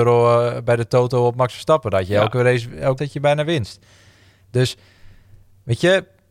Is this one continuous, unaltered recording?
no; 1 cut; at 3.0 s

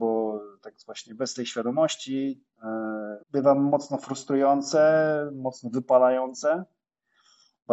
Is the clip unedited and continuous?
no; 1 cut; at 3.2 s

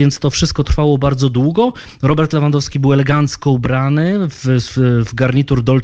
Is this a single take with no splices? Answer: yes; 0 cuts

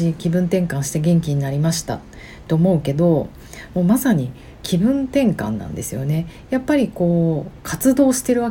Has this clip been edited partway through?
no; 0 cuts

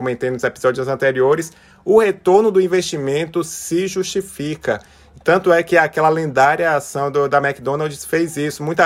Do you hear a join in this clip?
no; 0 cuts

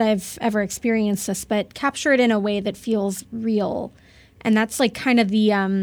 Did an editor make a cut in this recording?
no; 0 cuts

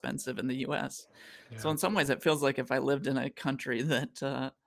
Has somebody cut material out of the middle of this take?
no; 0 cuts

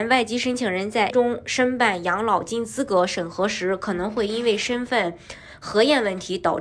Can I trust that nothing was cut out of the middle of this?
no; 1 cut; at 1.1 s

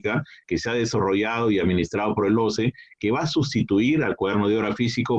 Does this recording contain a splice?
no; 0 cuts

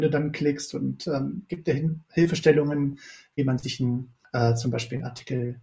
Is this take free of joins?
yes; 0 cuts

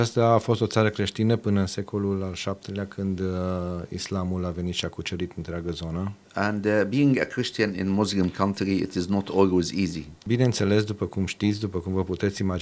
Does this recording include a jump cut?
yes; 1 cut; at 6.2 s

